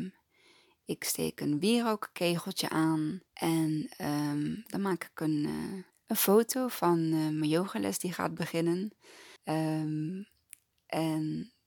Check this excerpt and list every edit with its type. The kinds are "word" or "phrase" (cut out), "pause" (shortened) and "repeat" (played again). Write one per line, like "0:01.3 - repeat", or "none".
0:03.3 - pause
0:05.9 - pause
0:09.4 - pause

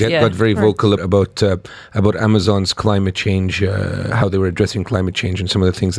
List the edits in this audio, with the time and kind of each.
0:01.0 - word

